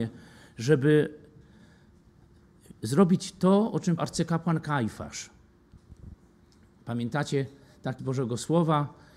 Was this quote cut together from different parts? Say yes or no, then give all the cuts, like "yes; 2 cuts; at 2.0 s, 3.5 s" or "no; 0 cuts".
yes; 2 cuts; at 4.0 s, 8.0 s